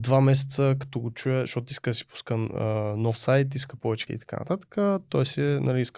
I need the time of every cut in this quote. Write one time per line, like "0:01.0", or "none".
0:04.1